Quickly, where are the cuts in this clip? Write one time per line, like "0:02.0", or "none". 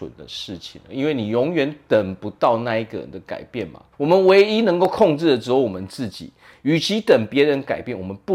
0:03.9